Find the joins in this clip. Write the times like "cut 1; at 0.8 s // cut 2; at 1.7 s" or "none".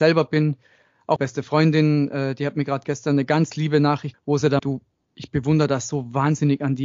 cut 1; at 1.2 s // cut 2; at 2.8 s // cut 3; at 4.1 s // cut 4; at 4.6 s